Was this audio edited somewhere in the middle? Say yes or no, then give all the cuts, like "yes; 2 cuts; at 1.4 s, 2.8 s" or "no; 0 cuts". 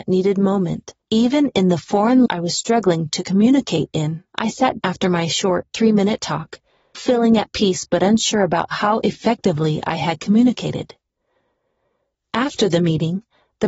yes; 5 cuts; at 1.0 s, 2.3 s, 4.3 s, 4.8 s, 6.9 s